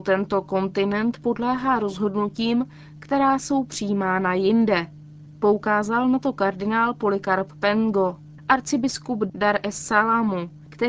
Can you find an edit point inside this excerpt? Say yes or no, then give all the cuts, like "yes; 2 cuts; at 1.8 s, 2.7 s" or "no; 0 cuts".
no; 0 cuts